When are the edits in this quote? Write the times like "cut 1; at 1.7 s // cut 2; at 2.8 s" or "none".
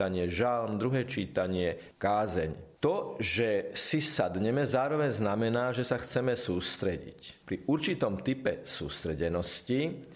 cut 1; at 2.8 s